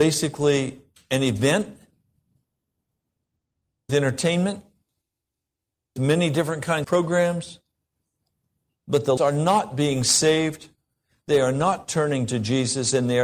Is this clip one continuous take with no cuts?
no; 4 cuts; at 3.9 s, 6.0 s, 6.8 s, 9.2 s

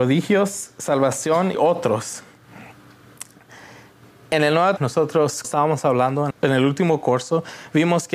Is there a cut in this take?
yes; 4 cuts; at 1.5 s, 4.8 s, 5.4 s, 6.3 s

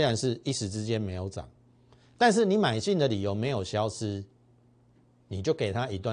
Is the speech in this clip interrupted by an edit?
no; 0 cuts

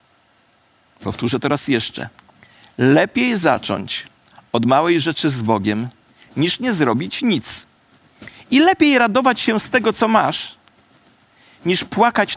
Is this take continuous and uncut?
yes; 0 cuts

